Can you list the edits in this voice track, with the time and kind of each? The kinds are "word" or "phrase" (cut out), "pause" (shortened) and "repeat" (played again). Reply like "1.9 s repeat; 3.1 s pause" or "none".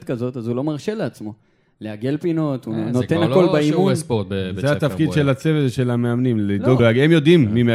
6.8 s word

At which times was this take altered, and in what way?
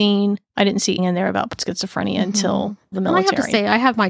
1.0 s word; 1.6 s word; 2.9 s word

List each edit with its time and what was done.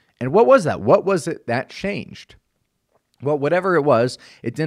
none

